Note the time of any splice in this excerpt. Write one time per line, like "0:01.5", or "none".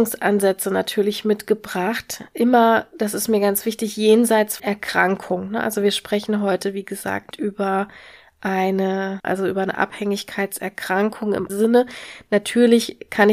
0:04.6
0:07.3
0:09.2
0:11.5